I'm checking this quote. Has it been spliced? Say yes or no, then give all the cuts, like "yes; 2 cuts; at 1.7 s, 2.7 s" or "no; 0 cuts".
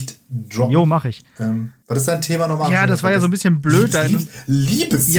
yes; 1 cut; at 1.8 s